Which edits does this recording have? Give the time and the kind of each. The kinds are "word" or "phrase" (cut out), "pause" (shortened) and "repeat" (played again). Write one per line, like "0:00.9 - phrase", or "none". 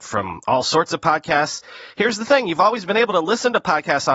none